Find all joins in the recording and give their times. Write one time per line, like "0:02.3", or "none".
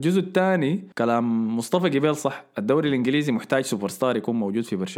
0:00.9